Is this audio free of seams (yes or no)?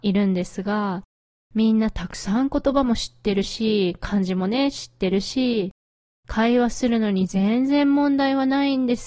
yes